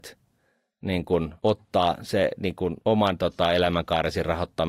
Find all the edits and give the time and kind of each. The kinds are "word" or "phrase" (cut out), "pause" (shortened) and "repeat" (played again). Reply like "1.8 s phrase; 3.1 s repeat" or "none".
1.4 s pause; 2.8 s word

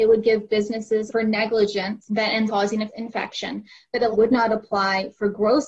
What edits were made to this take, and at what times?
1.1 s word; 2.5 s word; 2.9 s word; 4.1 s word

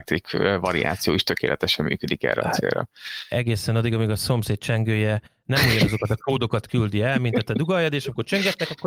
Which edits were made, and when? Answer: none

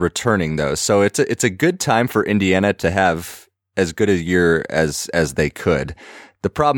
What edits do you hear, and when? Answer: none

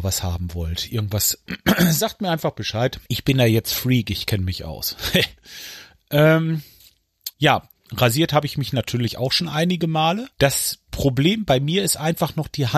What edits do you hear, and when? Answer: 3.1 s pause; 7.3 s pause; 10.3 s pause

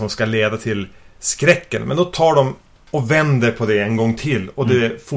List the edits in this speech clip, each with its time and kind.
none

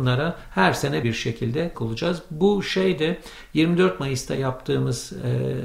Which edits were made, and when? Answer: 1.0 s word; 1.7 s phrase

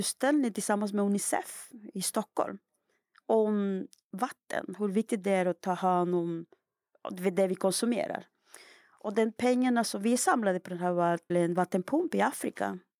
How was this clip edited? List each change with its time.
11.3 s word

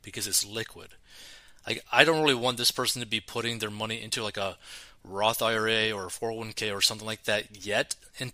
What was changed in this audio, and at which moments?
none

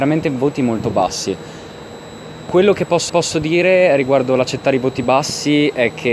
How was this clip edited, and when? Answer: 3.1 s repeat

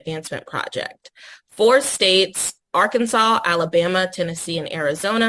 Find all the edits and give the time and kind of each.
none

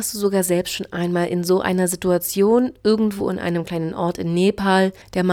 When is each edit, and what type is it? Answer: none

